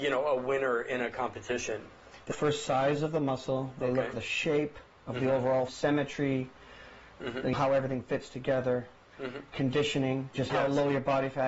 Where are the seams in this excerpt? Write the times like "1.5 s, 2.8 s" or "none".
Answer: 2.3 s, 4.1 s, 5.7 s, 7.5 s, 10.3 s